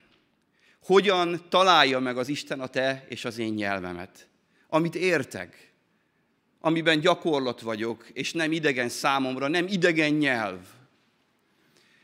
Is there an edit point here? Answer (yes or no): no